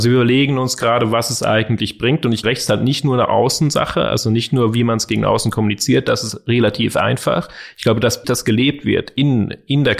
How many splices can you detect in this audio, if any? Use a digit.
2